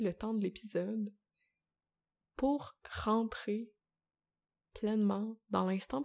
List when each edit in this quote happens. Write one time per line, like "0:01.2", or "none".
none